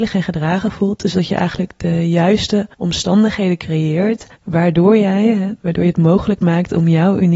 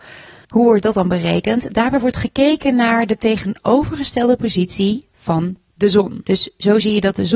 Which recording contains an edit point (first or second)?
first